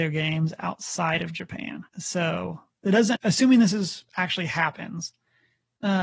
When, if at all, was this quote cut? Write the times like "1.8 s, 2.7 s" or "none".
1.9 s, 3.2 s, 4.1 s